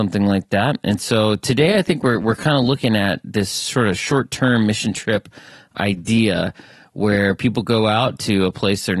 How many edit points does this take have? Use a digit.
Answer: 0